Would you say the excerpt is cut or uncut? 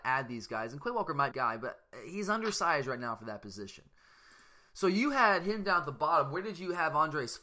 cut